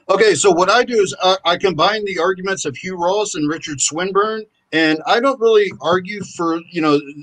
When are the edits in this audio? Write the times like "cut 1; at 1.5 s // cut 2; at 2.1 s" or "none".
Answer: cut 1; at 4.5 s